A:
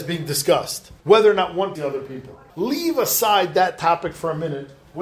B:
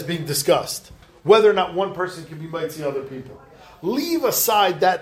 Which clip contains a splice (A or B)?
A